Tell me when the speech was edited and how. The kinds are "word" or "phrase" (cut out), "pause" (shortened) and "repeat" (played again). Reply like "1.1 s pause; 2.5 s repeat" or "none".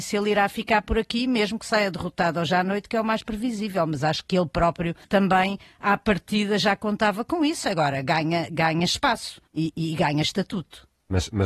5.0 s pause; 9.5 s pause